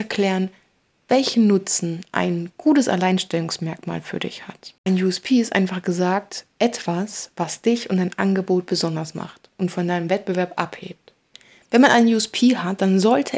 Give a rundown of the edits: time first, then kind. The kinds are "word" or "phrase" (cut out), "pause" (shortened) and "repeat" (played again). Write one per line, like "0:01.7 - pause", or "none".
0:04.8 - pause
0:11.3 - pause